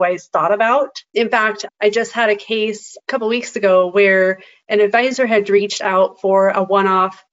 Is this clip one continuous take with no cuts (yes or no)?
no